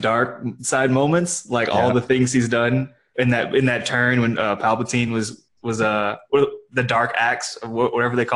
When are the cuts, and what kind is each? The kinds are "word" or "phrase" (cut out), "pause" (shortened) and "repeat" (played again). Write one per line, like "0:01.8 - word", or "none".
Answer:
none